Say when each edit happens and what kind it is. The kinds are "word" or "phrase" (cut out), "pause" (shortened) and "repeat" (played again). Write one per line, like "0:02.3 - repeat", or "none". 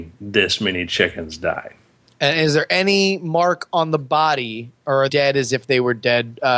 0:02.0 - pause
0:05.1 - phrase